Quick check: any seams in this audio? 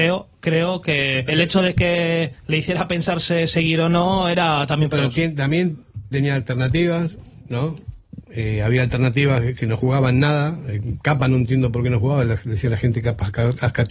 yes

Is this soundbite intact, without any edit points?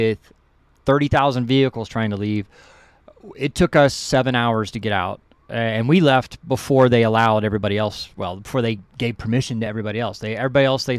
yes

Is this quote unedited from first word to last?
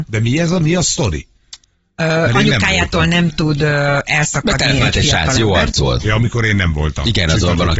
yes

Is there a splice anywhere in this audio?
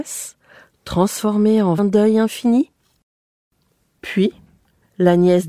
yes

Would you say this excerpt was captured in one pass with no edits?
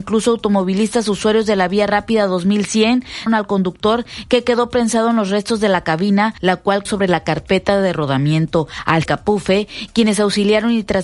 no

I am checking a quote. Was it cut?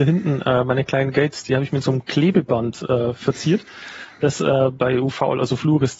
no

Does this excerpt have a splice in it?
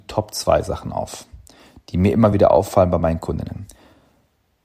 no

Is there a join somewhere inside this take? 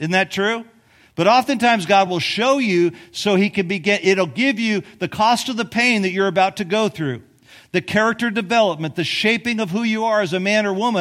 no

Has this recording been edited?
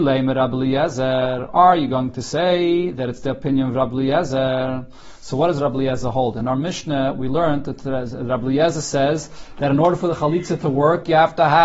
no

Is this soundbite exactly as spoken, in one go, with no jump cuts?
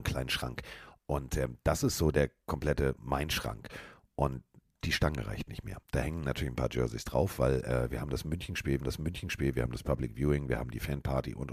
no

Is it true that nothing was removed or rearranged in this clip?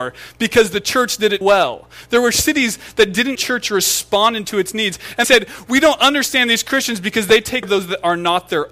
no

